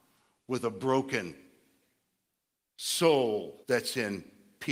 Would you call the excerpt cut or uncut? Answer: cut